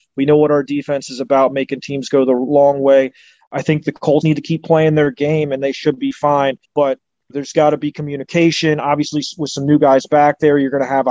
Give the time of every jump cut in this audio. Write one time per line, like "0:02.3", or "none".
0:04.2
0:06.6
0:07.3